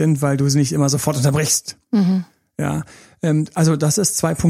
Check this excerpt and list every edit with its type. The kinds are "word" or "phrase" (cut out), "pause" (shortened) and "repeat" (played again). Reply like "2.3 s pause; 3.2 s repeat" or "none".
none